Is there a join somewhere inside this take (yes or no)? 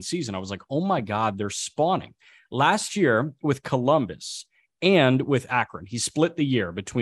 no